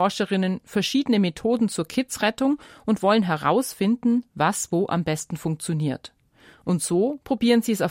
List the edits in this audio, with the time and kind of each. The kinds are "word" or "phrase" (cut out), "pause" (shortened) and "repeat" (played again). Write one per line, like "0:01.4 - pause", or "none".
none